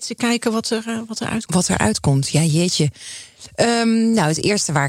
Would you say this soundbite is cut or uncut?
uncut